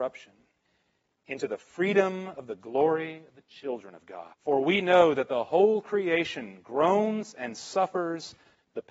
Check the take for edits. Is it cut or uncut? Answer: cut